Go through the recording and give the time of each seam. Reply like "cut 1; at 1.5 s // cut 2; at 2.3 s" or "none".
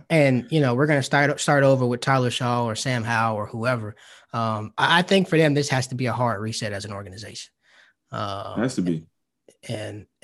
none